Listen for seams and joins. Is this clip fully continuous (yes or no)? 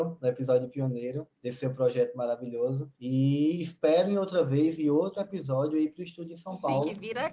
no